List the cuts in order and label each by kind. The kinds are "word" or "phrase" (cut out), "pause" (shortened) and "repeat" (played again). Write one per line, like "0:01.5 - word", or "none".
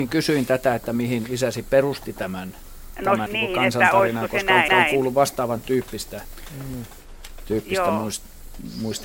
0:03.3 - phrase
0:04.7 - repeat